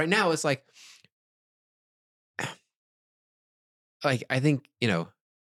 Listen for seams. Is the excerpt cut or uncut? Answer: uncut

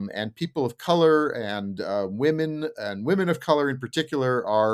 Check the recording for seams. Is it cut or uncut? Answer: uncut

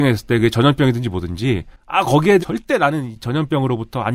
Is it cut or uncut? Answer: cut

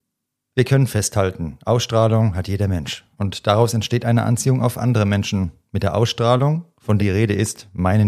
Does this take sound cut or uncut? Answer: cut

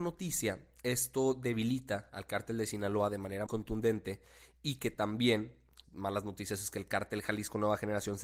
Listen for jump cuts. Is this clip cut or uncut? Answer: cut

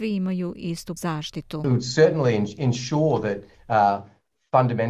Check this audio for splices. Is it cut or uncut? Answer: cut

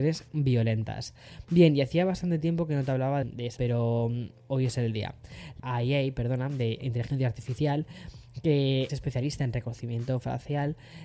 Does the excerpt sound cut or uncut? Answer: cut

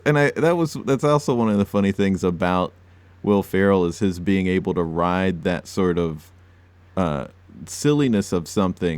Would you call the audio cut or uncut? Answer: uncut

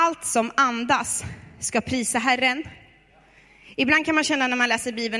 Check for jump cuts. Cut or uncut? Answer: uncut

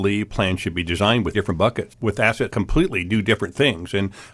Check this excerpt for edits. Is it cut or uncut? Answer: cut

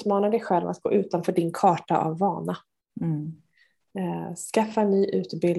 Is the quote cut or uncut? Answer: uncut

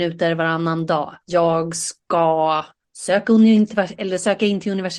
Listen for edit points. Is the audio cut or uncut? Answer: cut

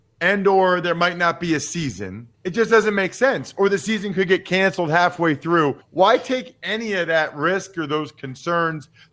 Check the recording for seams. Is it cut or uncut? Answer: cut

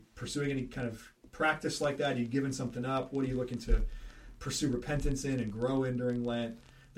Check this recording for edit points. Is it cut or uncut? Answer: uncut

